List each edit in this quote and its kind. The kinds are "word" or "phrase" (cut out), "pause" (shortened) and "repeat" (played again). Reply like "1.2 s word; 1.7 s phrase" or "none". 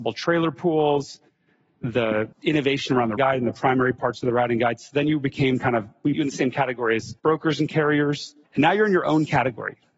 2.3 s pause; 3.2 s word; 6.1 s word; 7.2 s pause; 8.4 s pause